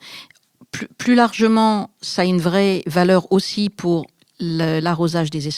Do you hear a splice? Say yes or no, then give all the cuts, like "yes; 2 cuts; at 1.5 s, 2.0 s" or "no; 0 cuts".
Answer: no; 0 cuts